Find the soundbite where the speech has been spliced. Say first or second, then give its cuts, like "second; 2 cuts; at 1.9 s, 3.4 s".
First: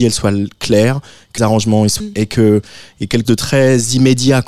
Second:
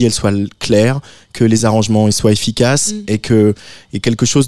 first; 3 cuts; at 1.4 s, 2.0 s, 3.2 s